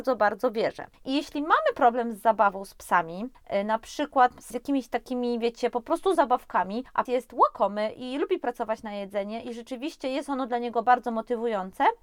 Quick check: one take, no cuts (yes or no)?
no